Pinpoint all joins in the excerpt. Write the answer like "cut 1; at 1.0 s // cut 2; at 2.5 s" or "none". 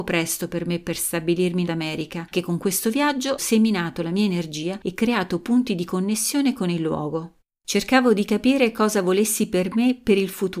cut 1; at 1.6 s // cut 2; at 2.3 s // cut 3; at 3.4 s // cut 4; at 7.4 s